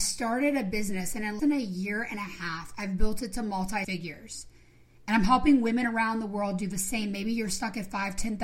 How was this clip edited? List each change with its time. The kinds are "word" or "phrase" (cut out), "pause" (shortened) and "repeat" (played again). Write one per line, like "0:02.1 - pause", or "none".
0:01.4 - word
0:03.8 - word